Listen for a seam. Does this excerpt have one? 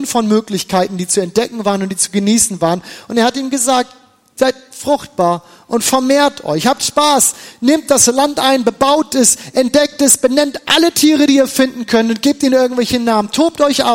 no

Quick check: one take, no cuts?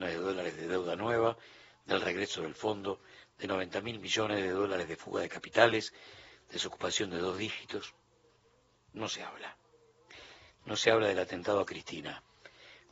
yes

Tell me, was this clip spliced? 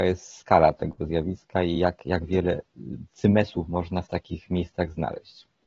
no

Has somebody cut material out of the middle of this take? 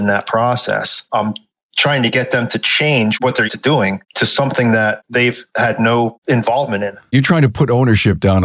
yes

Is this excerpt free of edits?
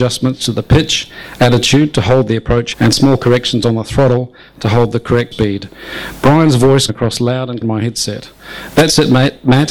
no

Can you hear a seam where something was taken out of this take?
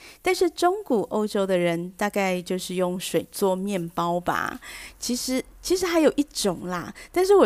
no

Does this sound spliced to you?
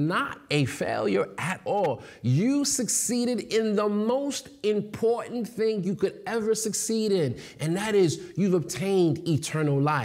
no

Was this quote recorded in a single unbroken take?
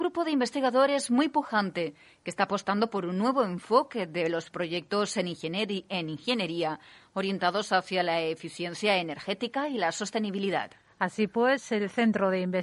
yes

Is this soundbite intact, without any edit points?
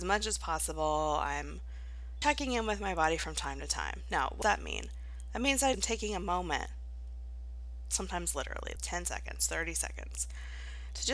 no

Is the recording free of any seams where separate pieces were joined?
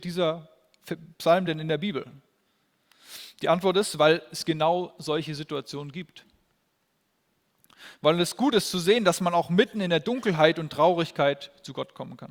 yes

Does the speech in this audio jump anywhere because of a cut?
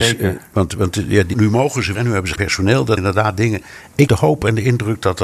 yes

